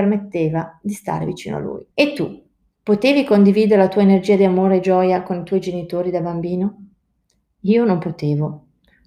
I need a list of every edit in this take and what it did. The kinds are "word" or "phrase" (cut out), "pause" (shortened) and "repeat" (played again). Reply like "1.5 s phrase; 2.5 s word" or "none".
1.9 s pause